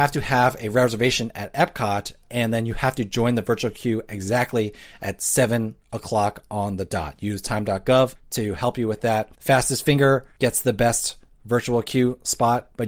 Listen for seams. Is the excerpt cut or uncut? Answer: uncut